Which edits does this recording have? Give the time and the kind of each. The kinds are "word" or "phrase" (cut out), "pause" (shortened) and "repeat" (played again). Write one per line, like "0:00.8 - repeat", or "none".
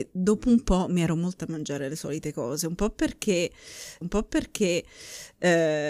0:01.4 - word
0:04.0 - repeat